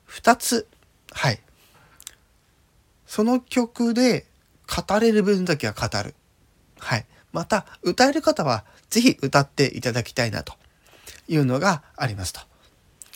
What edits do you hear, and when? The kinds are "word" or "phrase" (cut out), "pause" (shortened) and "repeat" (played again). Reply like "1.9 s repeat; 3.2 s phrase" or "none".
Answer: none

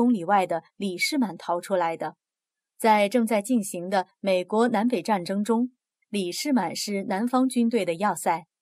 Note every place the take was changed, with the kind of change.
2.5 s pause

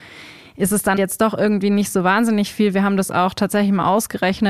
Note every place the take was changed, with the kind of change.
1.0 s word

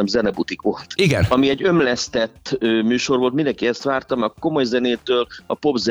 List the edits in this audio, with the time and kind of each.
none

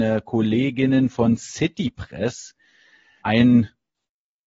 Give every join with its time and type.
3.2 s word

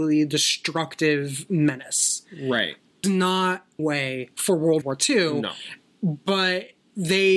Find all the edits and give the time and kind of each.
3.0 s word; 3.8 s phrase; 4.8 s phrase

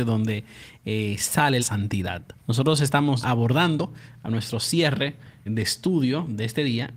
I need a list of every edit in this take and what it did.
1.6 s phrase; 2.4 s pause; 3.2 s word; 5.5 s word

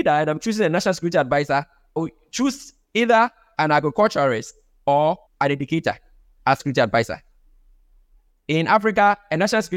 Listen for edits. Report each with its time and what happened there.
2.0 s word; 5.3 s pause; 6.6 s word

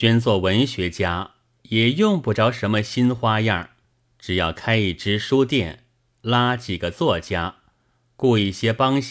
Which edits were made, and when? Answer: 3.9 s pause

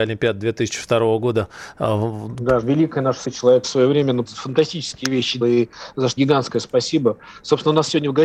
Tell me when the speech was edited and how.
2.6 s word; 3.2 s word; 3.6 s word; 4.2 s word; 5.4 s word; 6.2 s word

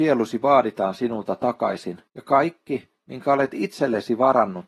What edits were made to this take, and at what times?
2.1 s pause

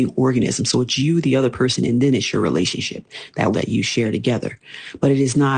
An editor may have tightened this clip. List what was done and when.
3.5 s word

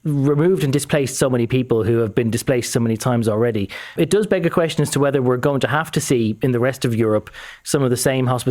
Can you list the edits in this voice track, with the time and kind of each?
4.0 s word

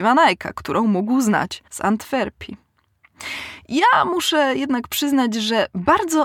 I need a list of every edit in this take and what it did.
1.7 s pause

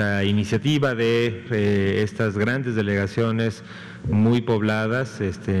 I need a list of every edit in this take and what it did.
1.5 s word

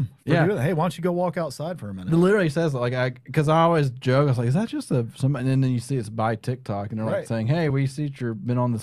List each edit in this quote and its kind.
none

